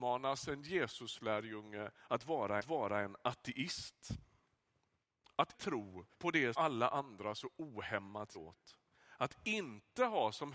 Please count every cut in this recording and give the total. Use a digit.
5